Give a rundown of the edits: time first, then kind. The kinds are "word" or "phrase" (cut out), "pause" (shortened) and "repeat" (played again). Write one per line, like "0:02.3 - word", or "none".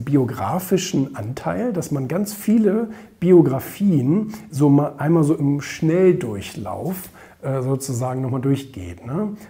none